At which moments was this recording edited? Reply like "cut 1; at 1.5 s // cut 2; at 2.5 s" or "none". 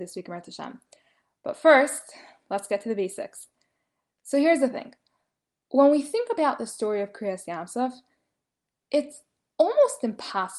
none